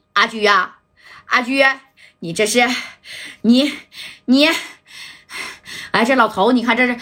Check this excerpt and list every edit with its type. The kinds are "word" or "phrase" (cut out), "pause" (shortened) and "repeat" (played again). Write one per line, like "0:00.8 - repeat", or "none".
none